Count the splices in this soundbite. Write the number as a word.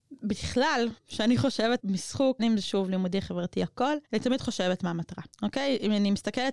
five